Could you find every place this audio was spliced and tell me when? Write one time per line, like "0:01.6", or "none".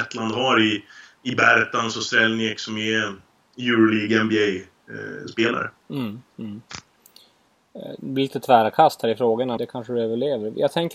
0:09.6